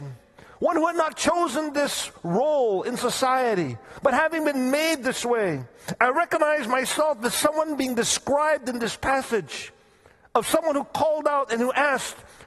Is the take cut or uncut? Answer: uncut